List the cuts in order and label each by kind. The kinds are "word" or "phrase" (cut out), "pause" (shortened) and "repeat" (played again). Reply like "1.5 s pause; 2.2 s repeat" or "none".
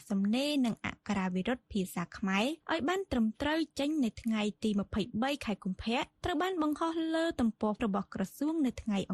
7.8 s word